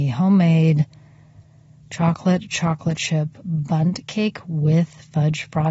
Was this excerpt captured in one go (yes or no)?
yes